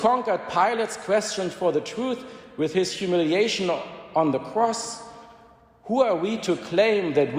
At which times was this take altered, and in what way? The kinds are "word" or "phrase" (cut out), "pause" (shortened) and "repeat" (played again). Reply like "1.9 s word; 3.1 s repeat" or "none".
none